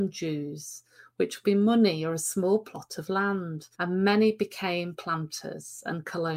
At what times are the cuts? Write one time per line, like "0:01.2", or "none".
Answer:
0:01.4
0:03.7